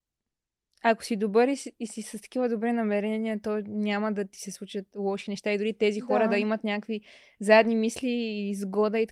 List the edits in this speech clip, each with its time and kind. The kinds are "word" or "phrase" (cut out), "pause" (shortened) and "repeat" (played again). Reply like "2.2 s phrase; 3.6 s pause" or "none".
none